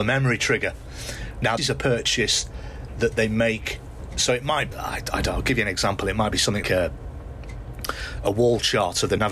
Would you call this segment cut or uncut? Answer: cut